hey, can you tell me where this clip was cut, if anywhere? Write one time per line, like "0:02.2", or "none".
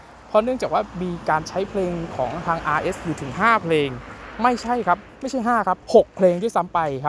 0:05.8